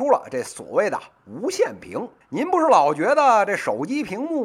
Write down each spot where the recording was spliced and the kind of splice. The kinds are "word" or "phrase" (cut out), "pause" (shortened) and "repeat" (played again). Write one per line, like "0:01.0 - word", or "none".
0:02.2 - pause